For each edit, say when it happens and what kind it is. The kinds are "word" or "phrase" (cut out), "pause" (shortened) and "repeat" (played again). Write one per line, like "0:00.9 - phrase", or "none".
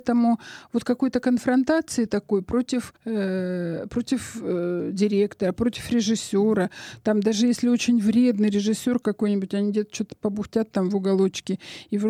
0:03.0 - pause